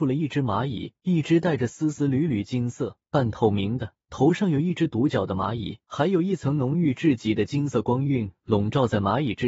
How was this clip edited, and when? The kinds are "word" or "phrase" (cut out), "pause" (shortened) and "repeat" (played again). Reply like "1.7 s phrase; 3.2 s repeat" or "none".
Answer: 1.0 s pause; 3.0 s pause; 4.0 s pause; 5.8 s pause